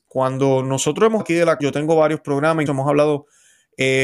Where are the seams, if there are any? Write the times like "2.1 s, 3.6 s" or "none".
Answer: 1.2 s, 1.6 s, 2.7 s

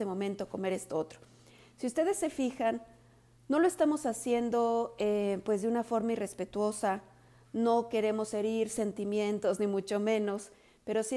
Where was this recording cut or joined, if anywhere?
none

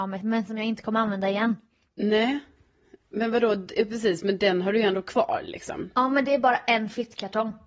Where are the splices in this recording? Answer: none

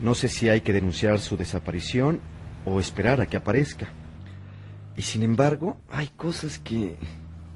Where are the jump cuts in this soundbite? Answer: 5.8 s

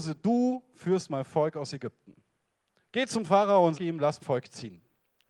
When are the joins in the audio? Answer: 3.7 s, 4.2 s

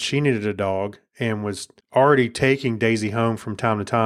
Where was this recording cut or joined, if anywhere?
1.8 s

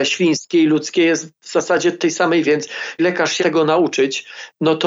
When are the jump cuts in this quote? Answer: 2.4 s, 3.0 s, 3.4 s

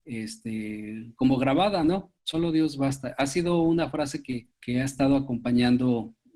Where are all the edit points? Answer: 4.5 s

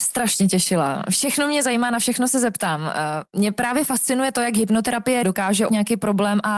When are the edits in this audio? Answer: 5.2 s, 5.7 s

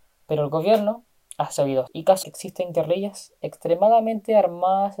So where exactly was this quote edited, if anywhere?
1.9 s, 2.2 s

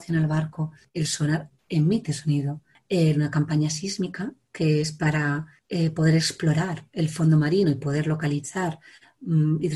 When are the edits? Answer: none

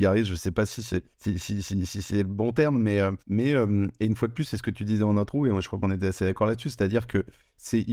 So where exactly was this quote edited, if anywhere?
1.1 s, 3.2 s

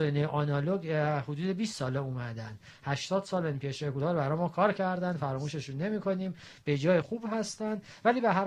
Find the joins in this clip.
7.0 s

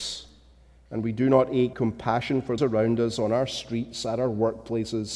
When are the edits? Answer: 1.7 s, 2.6 s

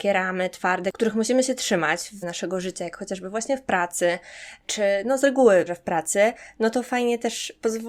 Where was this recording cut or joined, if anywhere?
2.2 s, 5.7 s

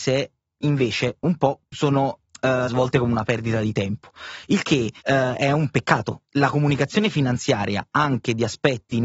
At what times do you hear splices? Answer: 1.6 s, 2.7 s, 5.0 s, 6.2 s

